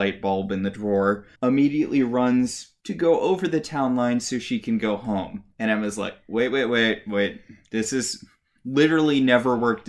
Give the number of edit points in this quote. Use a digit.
2